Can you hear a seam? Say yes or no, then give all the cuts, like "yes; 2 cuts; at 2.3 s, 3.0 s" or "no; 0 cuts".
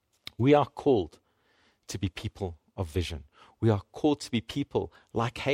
no; 0 cuts